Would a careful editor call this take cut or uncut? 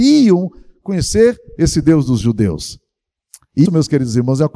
cut